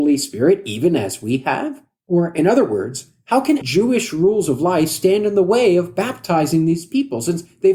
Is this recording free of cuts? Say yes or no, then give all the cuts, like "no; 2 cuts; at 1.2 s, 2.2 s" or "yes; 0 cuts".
no; 1 cut; at 3.6 s